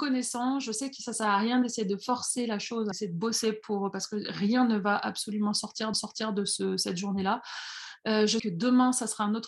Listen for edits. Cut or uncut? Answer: cut